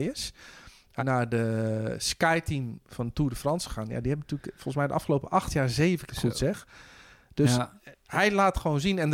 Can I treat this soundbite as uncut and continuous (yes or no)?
no